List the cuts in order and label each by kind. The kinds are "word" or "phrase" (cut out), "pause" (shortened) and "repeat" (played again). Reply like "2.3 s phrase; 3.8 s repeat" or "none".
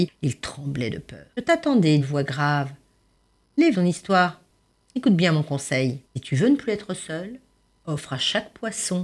1.3 s pause; 2.0 s phrase; 3.7 s phrase; 6.0 s pause